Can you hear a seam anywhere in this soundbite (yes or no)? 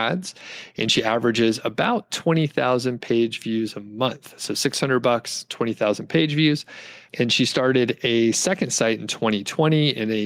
yes